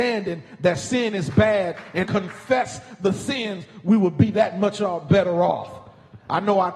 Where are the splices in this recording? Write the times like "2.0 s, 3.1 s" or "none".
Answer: 2.0 s